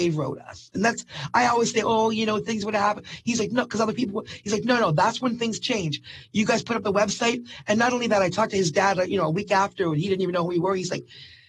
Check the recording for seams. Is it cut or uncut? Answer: uncut